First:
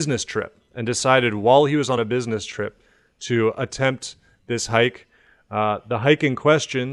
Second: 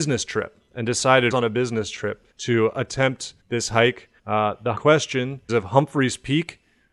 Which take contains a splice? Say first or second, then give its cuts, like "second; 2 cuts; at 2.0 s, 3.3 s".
second; 6 cuts; at 1.3 s, 2.3 s, 3.4 s, 4.2 s, 4.8 s, 5.5 s